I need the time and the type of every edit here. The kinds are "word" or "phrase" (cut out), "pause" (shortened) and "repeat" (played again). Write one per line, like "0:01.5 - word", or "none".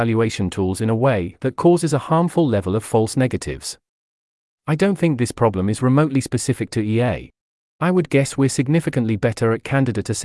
none